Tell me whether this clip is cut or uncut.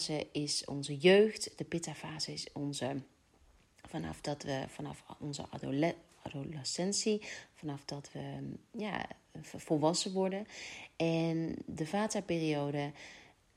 uncut